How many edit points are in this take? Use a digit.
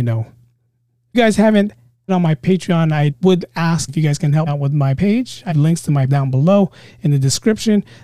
8